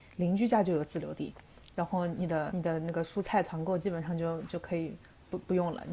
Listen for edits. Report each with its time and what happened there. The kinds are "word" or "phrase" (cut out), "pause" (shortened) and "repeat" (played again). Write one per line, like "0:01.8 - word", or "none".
0:02.5 - word